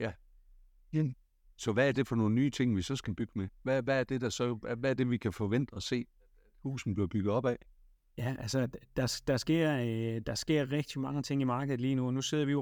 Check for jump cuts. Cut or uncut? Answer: uncut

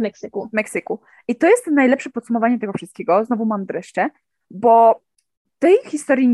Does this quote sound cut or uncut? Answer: uncut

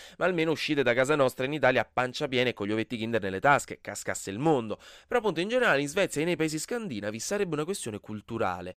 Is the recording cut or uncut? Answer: uncut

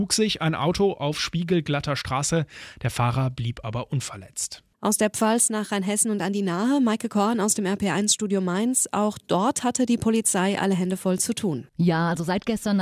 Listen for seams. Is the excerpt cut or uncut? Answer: uncut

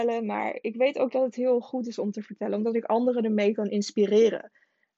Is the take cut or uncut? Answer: uncut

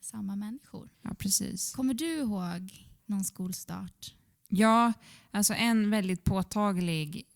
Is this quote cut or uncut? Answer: cut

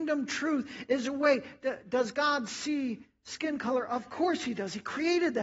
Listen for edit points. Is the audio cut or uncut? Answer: uncut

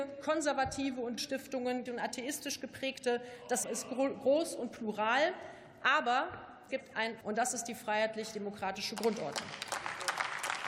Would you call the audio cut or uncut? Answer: cut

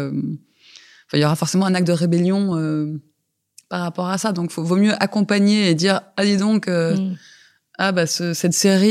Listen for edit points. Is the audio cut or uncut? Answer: uncut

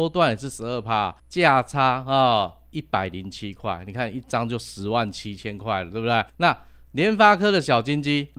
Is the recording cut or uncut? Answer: cut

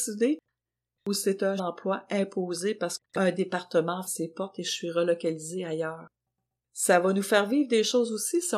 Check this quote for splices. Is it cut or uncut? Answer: cut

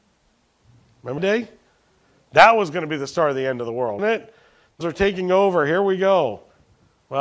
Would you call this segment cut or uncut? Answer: cut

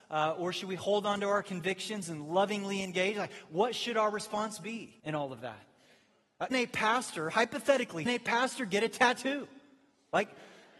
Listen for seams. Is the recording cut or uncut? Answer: cut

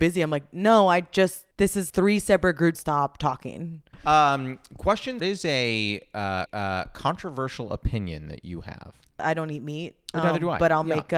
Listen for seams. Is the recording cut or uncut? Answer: cut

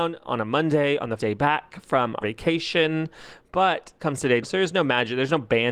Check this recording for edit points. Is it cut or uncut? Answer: cut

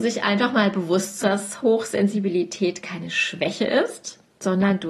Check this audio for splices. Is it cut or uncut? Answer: cut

